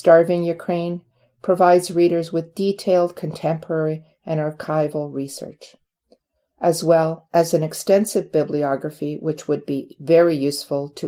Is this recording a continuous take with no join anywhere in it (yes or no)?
yes